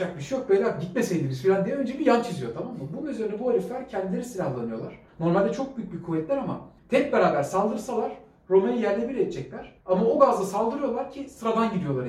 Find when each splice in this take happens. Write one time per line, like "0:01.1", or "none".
0:05.1
0:06.8
0:09.8